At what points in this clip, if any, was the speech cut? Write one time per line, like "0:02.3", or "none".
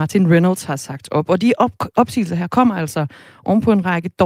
none